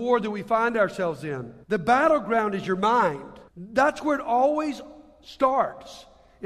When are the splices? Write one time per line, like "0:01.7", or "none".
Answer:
0:01.6
0:03.5